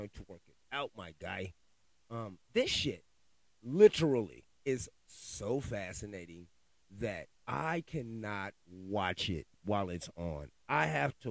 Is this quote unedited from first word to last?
no; 4 cuts; at 2.4 s, 4.5 s, 7.4 s, 9.5 s

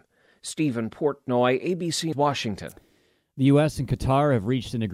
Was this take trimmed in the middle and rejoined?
yes; 1 cut; at 2.1 s

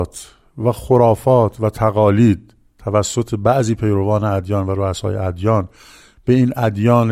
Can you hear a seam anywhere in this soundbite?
no; 0 cuts

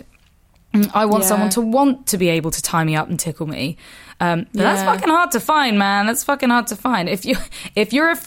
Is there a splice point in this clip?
no; 0 cuts

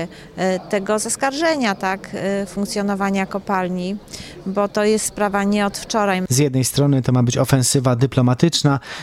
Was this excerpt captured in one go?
yes; 0 cuts

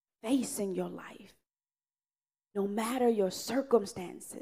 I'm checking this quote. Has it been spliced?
no; 0 cuts

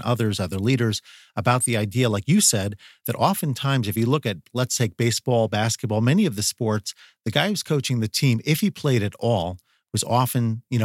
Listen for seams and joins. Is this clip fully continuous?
yes; 0 cuts

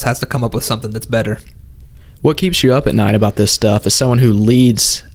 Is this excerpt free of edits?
yes; 0 cuts

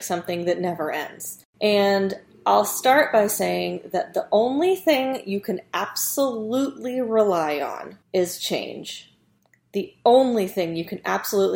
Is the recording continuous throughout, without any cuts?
no; 1 cut; at 8.0 s

